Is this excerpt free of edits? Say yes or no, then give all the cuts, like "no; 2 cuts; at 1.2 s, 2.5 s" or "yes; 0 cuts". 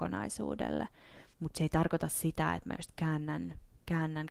no; 1 cut; at 1.3 s